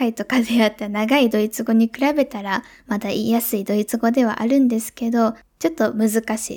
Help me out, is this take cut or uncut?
uncut